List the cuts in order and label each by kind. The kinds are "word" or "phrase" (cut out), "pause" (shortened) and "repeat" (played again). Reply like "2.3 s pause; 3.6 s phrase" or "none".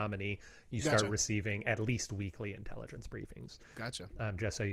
none